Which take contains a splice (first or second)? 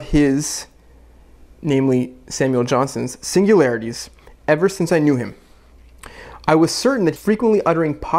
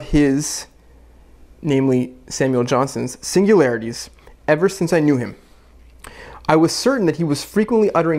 first